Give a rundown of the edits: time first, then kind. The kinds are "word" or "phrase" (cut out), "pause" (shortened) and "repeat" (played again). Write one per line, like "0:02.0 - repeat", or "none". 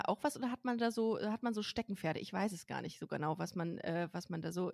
none